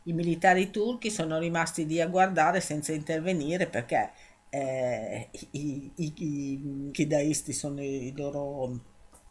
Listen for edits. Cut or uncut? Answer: cut